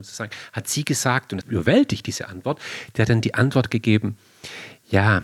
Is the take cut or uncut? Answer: cut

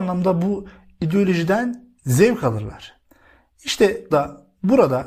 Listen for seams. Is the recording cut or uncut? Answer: cut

